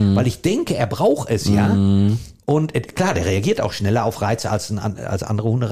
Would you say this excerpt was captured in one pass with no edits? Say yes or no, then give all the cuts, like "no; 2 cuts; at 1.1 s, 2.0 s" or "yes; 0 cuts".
yes; 0 cuts